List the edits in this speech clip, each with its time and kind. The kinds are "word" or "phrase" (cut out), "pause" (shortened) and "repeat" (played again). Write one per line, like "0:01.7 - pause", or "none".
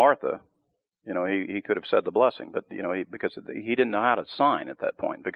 none